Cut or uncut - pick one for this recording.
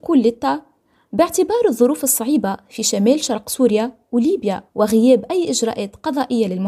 cut